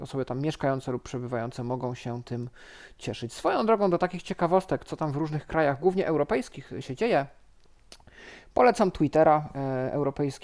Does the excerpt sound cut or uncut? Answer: uncut